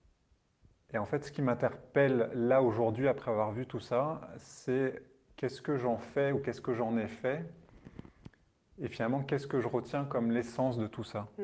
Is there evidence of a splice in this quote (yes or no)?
no